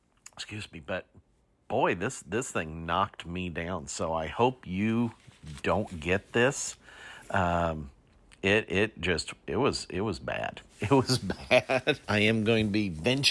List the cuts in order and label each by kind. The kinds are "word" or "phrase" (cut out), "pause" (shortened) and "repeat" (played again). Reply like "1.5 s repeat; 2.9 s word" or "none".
12.0 s word

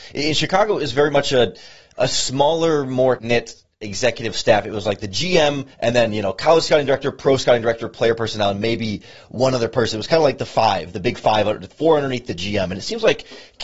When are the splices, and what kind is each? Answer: 3.2 s word; 5.7 s pause

